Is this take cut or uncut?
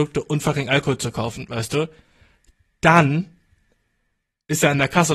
uncut